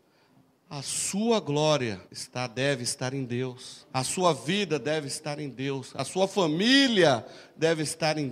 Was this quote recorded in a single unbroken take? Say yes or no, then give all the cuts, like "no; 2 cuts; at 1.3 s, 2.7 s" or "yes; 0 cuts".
no; 2 cuts; at 2.0 s, 3.9 s